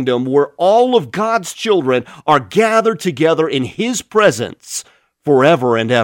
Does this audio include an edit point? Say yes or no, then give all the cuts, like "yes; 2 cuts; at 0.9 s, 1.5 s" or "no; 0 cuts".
no; 0 cuts